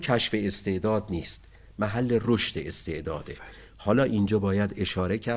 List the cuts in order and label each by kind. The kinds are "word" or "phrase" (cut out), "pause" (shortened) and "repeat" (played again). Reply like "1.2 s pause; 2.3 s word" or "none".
none